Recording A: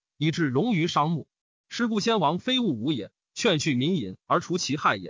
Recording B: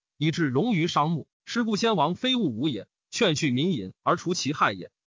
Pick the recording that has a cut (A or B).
B